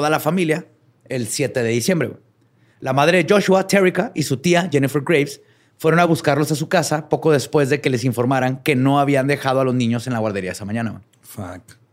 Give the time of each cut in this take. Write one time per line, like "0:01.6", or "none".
none